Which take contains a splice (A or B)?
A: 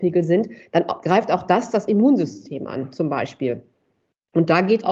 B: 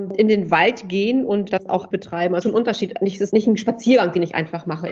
B